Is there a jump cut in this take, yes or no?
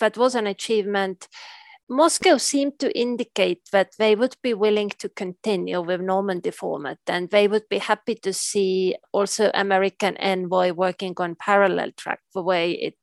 no